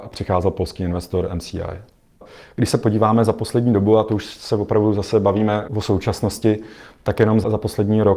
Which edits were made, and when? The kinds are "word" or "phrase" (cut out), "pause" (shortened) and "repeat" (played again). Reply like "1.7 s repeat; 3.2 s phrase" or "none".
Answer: none